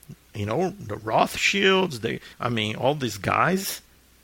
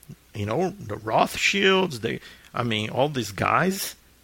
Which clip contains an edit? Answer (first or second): first